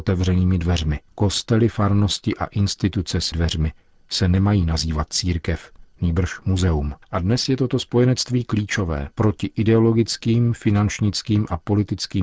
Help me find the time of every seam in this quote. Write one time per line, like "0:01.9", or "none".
0:01.1
0:03.3
0:07.0
0:09.1

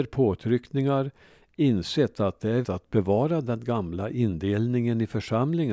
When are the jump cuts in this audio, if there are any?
0:02.6

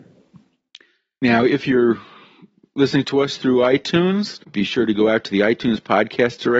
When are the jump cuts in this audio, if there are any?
0:04.4

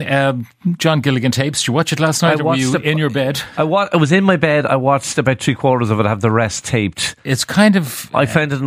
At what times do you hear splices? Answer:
none

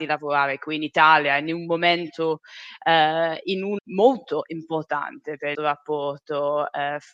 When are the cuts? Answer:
0:03.8
0:05.5

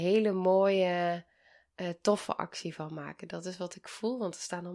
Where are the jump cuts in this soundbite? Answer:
none

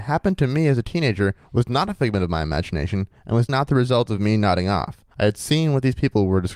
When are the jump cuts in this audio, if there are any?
0:03.5
0:05.1

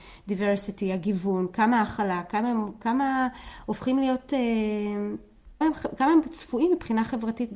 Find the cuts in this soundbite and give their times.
0:05.6

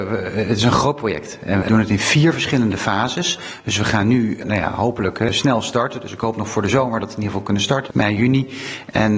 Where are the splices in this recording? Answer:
0:01.6
0:07.9

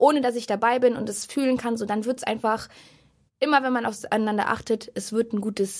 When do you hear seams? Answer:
none

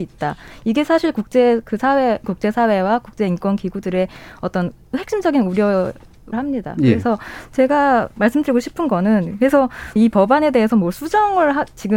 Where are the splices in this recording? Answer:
0:02.2
0:06.3
0:10.0

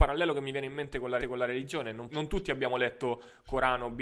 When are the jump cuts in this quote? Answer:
0:01.2
0:02.1

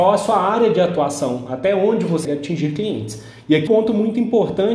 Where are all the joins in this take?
0:02.2
0:03.7

